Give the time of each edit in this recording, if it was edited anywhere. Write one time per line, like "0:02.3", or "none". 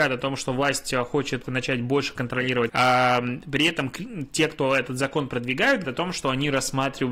0:01.4
0:02.7
0:05.8